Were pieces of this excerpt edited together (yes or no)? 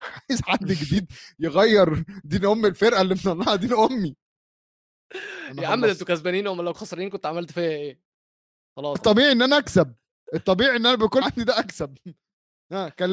yes